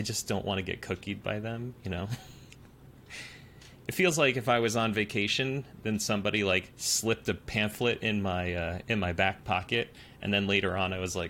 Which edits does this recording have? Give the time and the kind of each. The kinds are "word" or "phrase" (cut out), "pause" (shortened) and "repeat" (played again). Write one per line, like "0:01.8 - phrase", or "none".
none